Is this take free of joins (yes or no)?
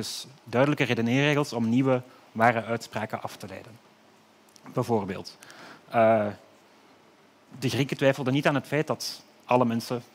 yes